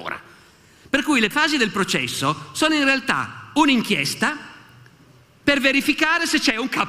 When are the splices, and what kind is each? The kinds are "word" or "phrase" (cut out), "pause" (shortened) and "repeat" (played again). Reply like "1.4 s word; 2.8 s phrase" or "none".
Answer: 1.3 s word